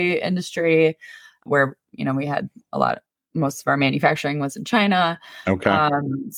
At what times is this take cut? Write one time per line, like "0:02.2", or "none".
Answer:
none